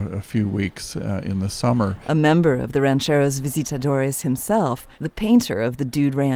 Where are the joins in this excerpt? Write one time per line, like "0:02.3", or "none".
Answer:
0:04.9